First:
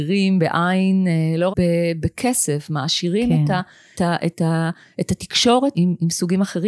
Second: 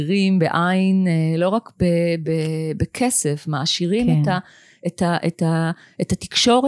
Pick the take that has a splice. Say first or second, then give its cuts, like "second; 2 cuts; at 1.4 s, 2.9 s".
first; 4 cuts; at 1.5 s, 2.0 s, 3.9 s, 5.7 s